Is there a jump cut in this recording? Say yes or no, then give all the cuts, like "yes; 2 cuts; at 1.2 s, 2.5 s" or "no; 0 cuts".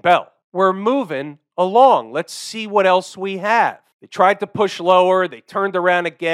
no; 0 cuts